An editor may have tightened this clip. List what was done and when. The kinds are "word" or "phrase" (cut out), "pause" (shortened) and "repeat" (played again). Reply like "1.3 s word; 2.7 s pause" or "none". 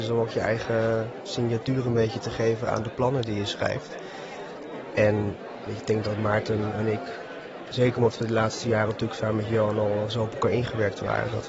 none